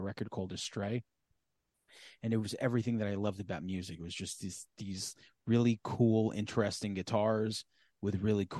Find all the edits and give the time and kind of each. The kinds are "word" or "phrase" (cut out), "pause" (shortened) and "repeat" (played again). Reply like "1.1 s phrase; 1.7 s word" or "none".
none